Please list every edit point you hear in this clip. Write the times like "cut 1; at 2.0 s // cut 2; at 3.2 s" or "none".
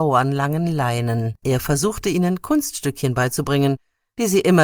cut 1; at 1.4 s